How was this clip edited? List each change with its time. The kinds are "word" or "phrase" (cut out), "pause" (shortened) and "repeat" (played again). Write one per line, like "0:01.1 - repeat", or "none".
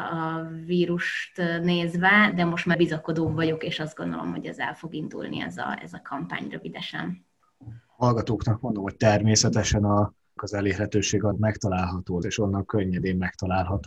0:02.3 - word
0:02.7 - word
0:10.4 - word
0:11.3 - word
0:12.2 - word